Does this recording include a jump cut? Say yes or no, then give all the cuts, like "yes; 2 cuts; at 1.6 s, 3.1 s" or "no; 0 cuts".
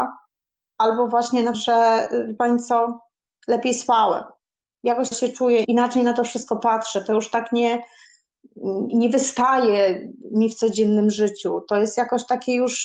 yes; 5 cuts; at 1.5 s, 3.3 s, 5.1 s, 5.6 s, 8.9 s